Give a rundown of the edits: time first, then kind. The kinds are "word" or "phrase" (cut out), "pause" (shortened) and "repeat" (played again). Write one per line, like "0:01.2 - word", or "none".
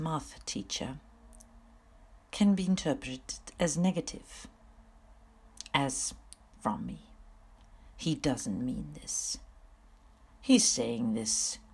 0:06.6 - phrase